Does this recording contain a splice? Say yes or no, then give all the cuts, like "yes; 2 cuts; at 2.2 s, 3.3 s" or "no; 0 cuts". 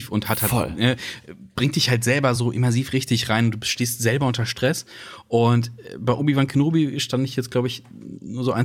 no; 0 cuts